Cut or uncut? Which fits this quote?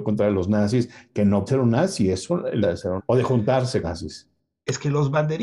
cut